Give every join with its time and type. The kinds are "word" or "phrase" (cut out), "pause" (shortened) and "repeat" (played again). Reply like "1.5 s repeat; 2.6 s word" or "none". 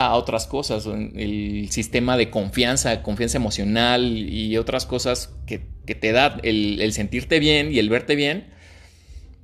none